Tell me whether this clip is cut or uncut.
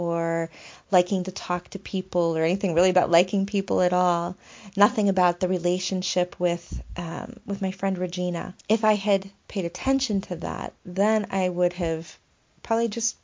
cut